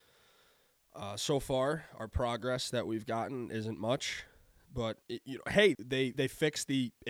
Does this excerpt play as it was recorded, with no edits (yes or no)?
no